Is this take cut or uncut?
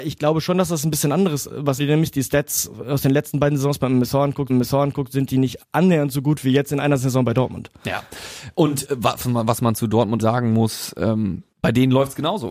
cut